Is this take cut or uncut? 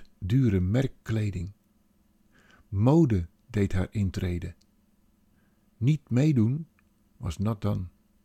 uncut